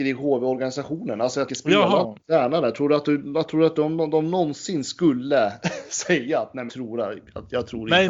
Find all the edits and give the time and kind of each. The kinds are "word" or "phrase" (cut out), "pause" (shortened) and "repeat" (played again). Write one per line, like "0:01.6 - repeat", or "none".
0:01.5 - word
0:06.7 - word